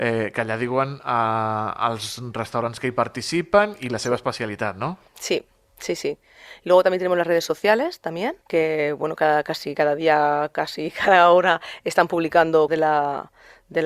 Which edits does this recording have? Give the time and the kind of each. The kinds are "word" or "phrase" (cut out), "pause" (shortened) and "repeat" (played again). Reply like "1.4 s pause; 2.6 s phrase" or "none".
5.1 s pause; 8.4 s pause; 12.7 s word